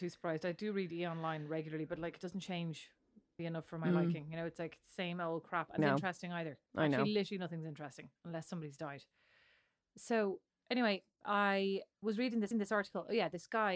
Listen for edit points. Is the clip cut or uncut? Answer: cut